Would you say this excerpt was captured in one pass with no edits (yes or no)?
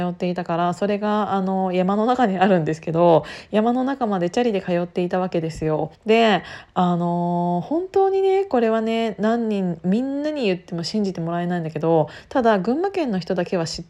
no